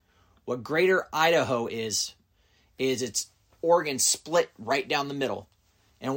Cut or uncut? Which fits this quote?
uncut